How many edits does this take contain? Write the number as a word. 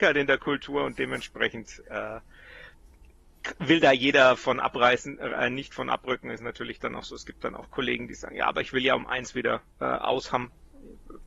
one